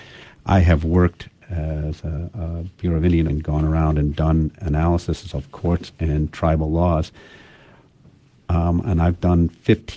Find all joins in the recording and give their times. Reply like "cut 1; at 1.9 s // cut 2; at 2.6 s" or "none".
cut 1; at 3.3 s